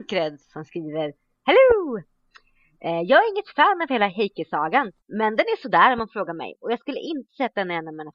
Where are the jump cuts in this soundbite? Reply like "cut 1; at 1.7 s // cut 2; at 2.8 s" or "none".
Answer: cut 1; at 5.0 s